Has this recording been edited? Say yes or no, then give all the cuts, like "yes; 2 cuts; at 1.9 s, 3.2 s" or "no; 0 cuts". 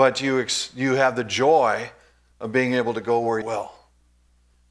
yes; 1 cut; at 3.4 s